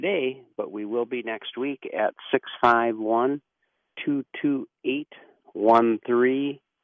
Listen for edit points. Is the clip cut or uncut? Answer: uncut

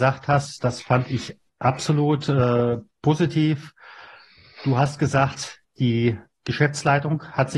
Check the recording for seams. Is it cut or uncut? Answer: uncut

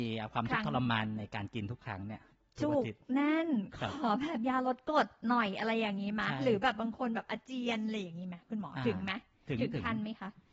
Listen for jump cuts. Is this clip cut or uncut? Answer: uncut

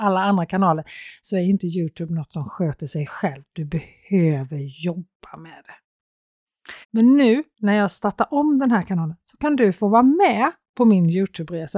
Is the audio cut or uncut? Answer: cut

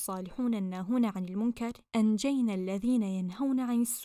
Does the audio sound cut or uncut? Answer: cut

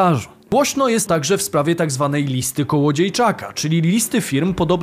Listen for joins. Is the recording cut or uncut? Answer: cut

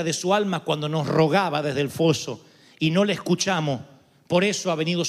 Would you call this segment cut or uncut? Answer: uncut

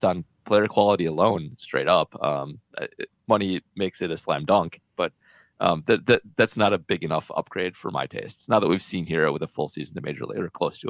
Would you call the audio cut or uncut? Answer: uncut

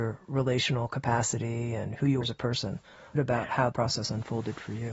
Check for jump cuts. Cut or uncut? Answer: cut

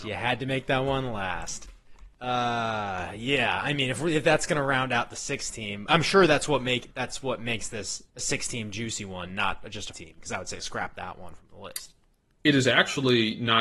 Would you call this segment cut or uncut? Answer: cut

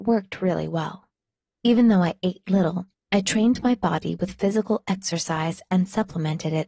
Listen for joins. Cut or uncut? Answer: uncut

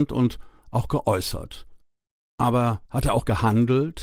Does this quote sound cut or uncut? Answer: cut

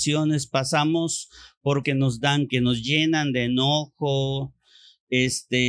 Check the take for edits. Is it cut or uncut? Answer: cut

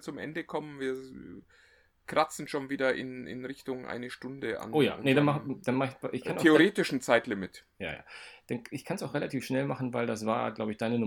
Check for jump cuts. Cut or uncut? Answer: uncut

